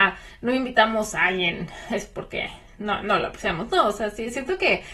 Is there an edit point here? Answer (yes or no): no